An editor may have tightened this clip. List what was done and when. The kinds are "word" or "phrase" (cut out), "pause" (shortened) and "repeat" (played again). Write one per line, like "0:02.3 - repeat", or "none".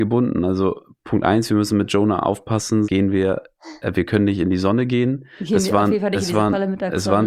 0:02.8 - word